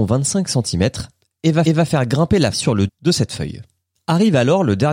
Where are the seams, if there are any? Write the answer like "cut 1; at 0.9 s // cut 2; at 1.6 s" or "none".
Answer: cut 1; at 1.7 s // cut 2; at 2.5 s // cut 3; at 2.9 s